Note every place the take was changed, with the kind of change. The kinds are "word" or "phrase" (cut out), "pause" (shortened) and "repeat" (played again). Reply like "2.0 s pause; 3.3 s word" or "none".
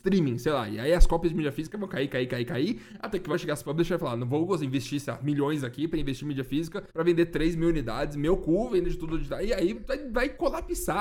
3.3 s word; 6.9 s pause; 9.7 s word